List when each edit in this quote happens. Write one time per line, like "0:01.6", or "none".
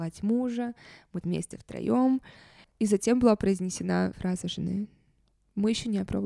0:01.2
0:04.1